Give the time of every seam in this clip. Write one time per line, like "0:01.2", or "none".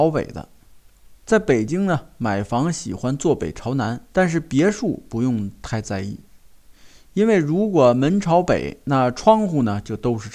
0:01.2
0:04.1